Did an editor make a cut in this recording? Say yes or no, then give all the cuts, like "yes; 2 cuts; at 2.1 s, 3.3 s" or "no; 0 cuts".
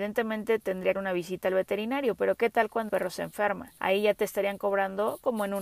yes; 3 cuts; at 0.9 s, 2.9 s, 3.8 s